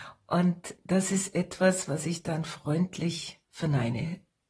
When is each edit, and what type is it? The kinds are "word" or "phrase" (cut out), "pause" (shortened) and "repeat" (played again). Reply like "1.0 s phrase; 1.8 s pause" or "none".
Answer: none